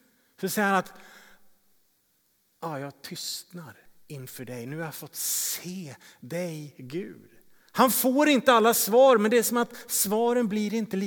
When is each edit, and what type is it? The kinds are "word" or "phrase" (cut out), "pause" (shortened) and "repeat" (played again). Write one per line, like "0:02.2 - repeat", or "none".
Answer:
none